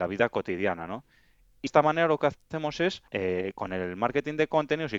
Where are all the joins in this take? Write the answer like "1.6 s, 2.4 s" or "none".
1.7 s, 3.1 s